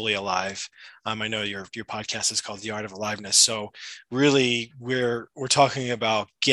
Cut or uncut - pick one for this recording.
uncut